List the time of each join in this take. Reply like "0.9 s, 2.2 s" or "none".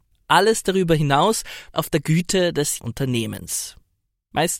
1.7 s, 2.8 s